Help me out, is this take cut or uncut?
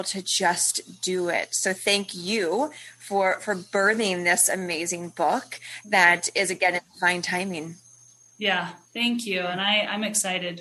uncut